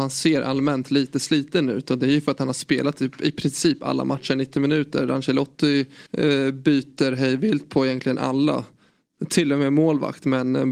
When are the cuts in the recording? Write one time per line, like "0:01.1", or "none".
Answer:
0:06.1

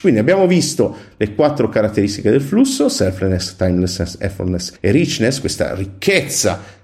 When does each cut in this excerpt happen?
0:04.8

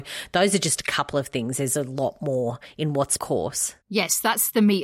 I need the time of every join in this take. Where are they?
0:03.2

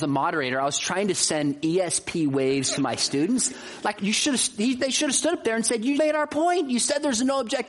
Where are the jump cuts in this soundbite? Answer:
0:04.0
0:05.9

